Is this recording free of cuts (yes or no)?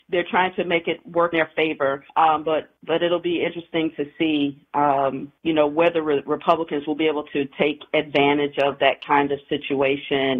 no